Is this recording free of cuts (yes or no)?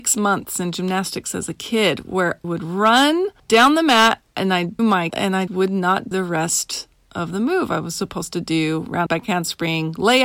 no